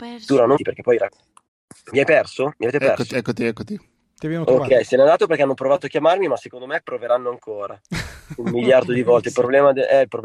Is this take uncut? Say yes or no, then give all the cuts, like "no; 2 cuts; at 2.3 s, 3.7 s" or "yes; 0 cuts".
no; 2 cuts; at 1.4 s, 3.1 s